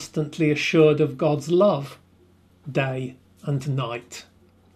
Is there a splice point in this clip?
no; 0 cuts

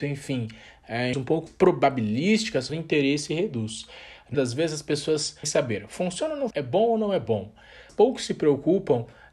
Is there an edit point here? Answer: yes; 7 cuts; at 1.1 s, 1.5 s, 2.7 s, 4.3 s, 5.4 s, 6.5 s, 7.9 s

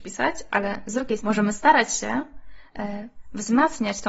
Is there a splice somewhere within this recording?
yes; 1 cut; at 1.2 s

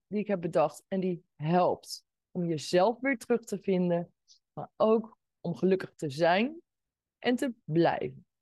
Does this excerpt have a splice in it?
no; 0 cuts

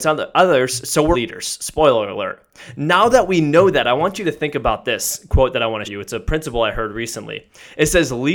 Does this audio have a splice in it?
yes; 2 cuts; at 1.1 s, 5.8 s

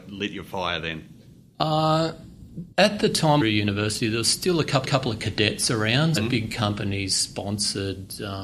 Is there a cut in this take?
yes; 4 cuts; at 2.7 s, 3.4 s, 4.8 s, 6.2 s

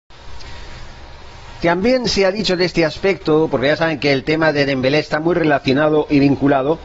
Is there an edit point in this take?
no; 0 cuts

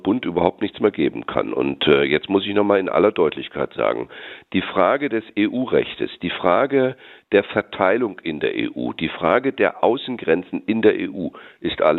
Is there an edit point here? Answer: no; 0 cuts

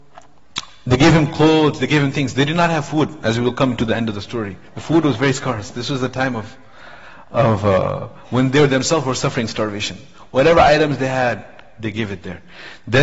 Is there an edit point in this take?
no; 0 cuts

